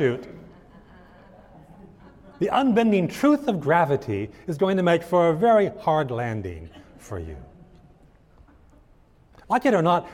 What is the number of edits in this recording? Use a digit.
0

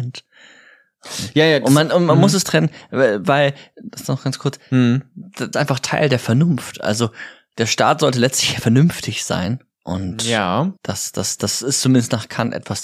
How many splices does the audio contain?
2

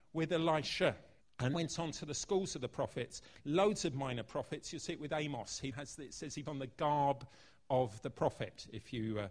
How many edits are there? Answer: 3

